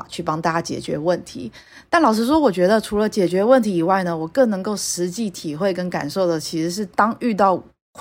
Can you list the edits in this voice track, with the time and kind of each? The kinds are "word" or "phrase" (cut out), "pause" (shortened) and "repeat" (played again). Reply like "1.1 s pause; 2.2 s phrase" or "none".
none